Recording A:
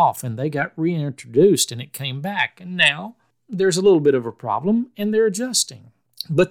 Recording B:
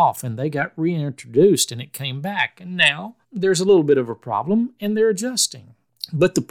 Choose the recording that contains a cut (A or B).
B